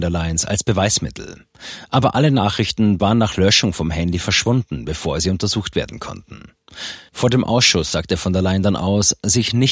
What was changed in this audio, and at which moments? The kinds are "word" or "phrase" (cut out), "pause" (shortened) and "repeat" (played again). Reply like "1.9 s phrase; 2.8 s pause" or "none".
none